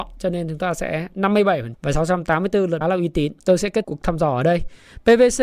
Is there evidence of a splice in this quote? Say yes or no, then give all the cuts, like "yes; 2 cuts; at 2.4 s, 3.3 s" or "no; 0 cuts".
yes; 4 cuts; at 1.7 s, 2.8 s, 3.4 s, 3.8 s